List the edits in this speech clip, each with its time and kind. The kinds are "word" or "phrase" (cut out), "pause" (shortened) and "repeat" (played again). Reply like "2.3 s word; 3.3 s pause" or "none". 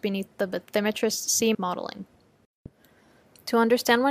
1.5 s phrase